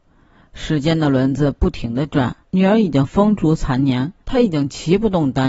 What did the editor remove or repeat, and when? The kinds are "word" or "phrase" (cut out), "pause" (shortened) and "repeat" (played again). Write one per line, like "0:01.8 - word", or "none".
0:02.4 - pause
0:04.2 - pause